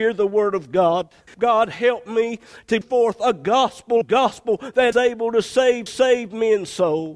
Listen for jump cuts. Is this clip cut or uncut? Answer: cut